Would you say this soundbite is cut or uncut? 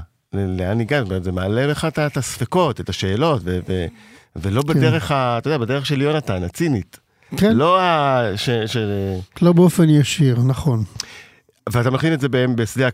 uncut